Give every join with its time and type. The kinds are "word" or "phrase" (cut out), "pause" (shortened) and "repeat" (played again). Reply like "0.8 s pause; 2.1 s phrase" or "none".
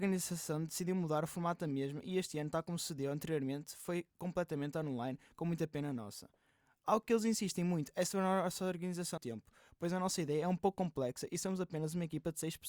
9.2 s word